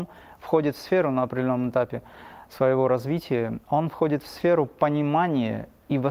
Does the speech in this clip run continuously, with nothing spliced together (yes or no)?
no